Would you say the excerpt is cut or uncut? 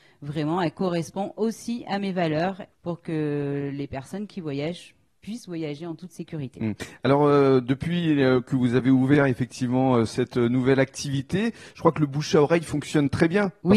uncut